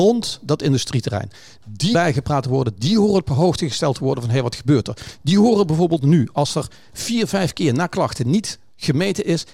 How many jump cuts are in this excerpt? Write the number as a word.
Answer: one